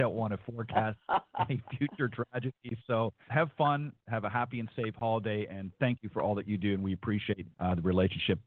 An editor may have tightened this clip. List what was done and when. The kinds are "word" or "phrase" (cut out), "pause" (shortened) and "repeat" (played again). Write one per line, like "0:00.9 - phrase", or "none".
0:03.3 - word
0:07.5 - pause